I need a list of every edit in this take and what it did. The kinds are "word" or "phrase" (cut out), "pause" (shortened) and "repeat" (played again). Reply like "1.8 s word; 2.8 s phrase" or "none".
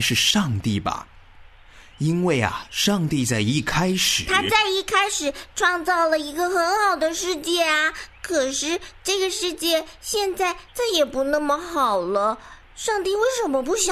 10.7 s pause